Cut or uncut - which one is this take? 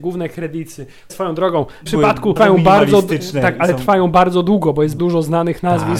cut